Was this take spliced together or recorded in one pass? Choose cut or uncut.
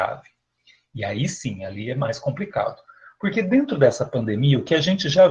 uncut